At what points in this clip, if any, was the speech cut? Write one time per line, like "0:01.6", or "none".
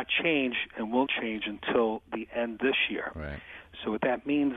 0:01.1
0:02.6

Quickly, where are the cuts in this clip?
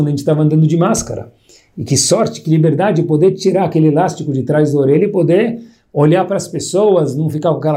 none

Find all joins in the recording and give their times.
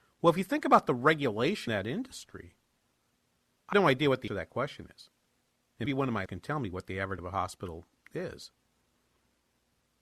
0:01.7
0:03.7
0:04.3
0:05.9
0:06.3
0:07.2

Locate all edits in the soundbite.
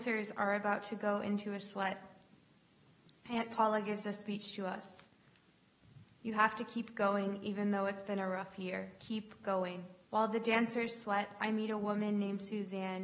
0:09.0
0:10.0

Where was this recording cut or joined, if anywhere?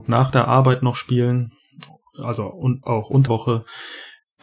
0:02.8
0:03.3

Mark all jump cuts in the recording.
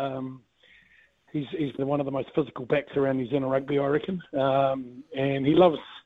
0:01.8

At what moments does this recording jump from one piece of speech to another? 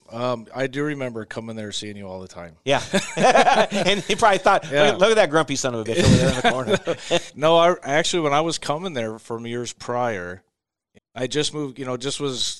0:07.3
0:11.0

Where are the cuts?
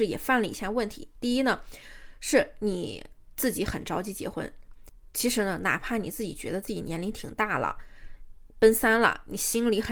none

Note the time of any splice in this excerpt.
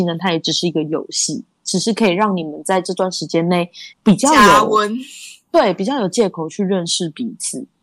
0:03.9

